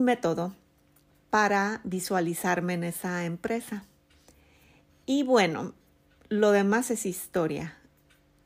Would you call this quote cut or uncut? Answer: uncut